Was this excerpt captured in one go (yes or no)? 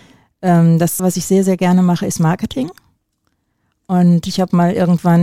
no